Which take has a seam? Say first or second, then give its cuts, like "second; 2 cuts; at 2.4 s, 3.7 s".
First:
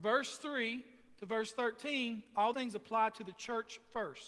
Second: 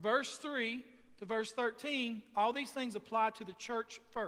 first; 1 cut; at 2.5 s